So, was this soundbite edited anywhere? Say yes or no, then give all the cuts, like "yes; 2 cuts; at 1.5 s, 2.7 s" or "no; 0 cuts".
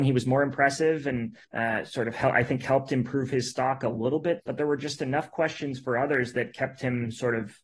yes; 2 cuts; at 1.4 s, 4.4 s